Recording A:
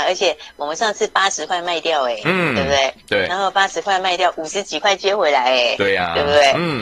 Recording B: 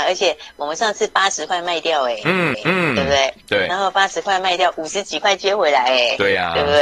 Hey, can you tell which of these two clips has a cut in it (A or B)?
B